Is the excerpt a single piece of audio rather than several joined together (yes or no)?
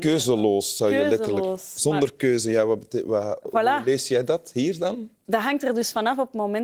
no